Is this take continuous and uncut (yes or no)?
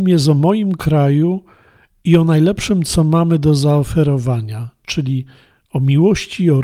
yes